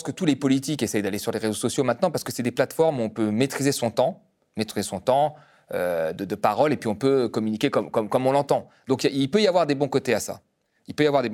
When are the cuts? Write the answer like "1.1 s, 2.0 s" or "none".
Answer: none